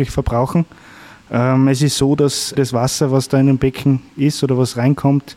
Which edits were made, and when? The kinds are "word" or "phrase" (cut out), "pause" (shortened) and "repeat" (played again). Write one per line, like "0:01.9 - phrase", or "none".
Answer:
0:02.6 - word